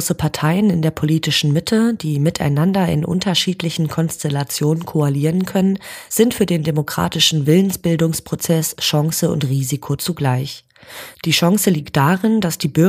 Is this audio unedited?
yes; 0 cuts

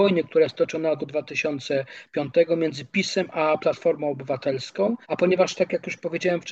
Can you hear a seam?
yes; 2 cuts; at 1.0 s, 5.0 s

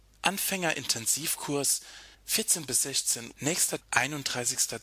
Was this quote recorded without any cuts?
no; 3 cuts; at 2.1 s, 3.3 s, 3.8 s

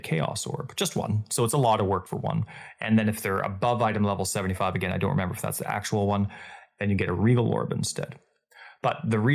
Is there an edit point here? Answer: yes; 1 cut; at 2.1 s

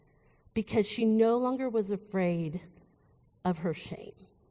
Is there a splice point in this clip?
no; 0 cuts

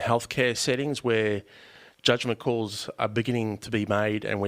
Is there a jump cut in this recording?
no; 0 cuts

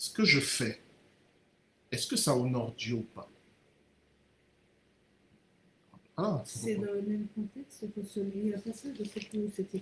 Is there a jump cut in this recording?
no; 0 cuts

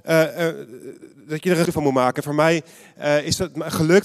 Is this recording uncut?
no; 1 cut; at 1.6 s

